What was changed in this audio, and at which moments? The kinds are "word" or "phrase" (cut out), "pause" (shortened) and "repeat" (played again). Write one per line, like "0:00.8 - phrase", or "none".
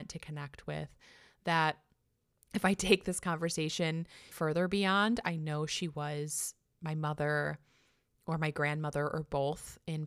0:04.3 - word